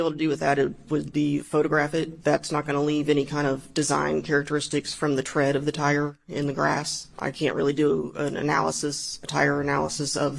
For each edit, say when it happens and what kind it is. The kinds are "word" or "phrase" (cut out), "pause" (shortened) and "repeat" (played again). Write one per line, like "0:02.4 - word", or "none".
none